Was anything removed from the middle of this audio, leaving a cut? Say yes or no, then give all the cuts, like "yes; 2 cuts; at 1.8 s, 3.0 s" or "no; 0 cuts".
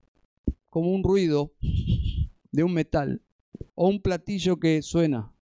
yes; 1 cut; at 3.7 s